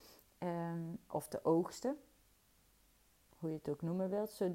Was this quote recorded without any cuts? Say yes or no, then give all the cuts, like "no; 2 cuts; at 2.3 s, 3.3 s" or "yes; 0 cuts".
yes; 0 cuts